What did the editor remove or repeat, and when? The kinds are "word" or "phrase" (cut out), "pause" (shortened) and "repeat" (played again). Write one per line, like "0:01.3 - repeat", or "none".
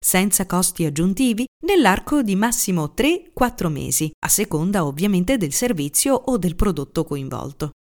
0:04.2 - pause